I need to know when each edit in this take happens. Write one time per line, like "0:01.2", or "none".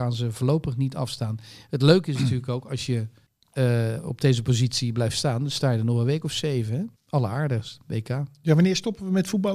0:03.3
0:07.0